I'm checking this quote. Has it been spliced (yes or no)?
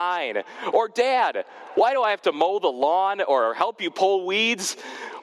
no